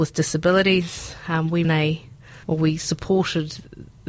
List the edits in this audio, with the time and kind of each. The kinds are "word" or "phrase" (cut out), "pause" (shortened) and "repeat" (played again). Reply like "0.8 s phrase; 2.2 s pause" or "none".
1.6 s word; 2.4 s pause